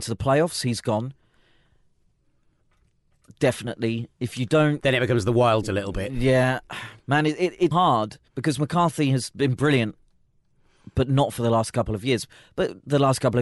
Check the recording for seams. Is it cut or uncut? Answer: cut